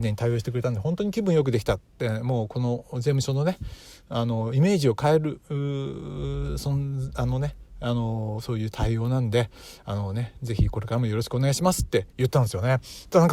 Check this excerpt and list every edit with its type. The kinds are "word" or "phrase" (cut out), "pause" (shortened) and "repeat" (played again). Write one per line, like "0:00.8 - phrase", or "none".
none